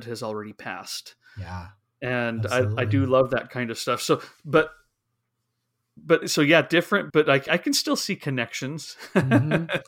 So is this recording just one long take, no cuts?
no; 3 cuts; at 6.2 s, 7.1 s, 7.5 s

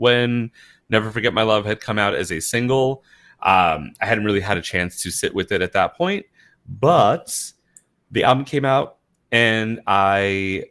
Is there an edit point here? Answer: no; 0 cuts

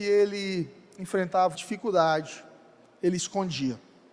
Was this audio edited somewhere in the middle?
yes; 2 cuts; at 1.5 s, 3.2 s

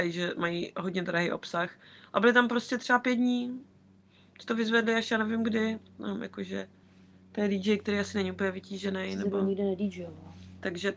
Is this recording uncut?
yes; 0 cuts

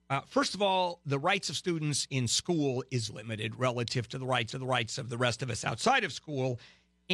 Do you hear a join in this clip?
yes; 2 cuts; at 3.1 s, 4.5 s

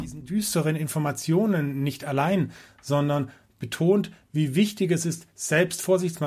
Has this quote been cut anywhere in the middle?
no; 0 cuts

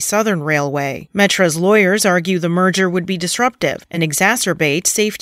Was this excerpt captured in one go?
yes; 0 cuts

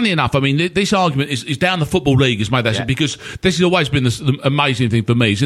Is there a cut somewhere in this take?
no; 0 cuts

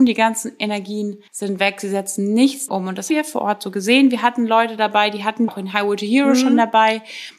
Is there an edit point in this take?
yes; 4 cuts; at 1.3 s, 2.7 s, 3.1 s, 5.5 s

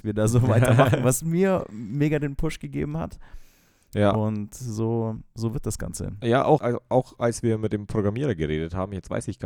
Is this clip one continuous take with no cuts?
no; 1 cut; at 6.6 s

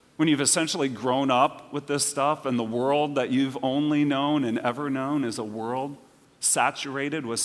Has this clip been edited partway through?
no; 0 cuts

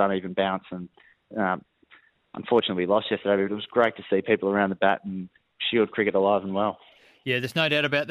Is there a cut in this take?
no; 0 cuts

